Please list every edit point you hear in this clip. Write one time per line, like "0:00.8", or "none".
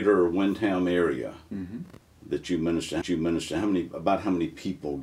0:02.0
0:03.0